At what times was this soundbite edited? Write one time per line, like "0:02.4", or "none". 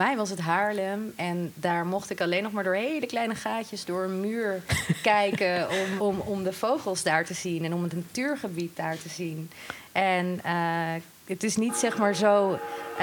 0:06.0